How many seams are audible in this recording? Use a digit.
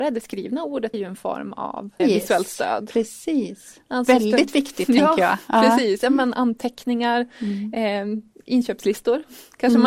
2